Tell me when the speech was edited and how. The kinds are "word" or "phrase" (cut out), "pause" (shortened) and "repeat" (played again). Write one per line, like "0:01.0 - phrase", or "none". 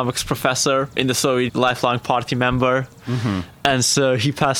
0:01.5 - word